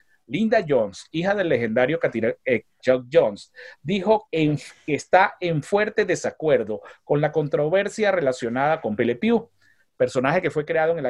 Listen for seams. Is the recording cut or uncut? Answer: cut